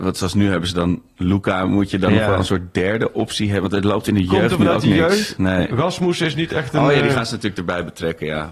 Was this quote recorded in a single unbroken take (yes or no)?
yes